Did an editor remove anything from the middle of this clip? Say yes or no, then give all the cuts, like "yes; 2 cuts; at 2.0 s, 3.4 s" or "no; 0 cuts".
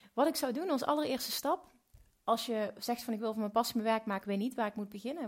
yes; 1 cut; at 4.2 s